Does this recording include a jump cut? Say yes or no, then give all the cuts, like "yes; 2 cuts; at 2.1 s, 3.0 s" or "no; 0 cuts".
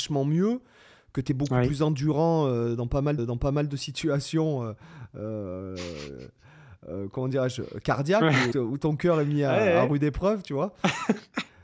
yes; 2 cuts; at 3.2 s, 8.5 s